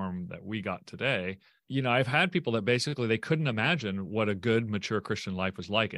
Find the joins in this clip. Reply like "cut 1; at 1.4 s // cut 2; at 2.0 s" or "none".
none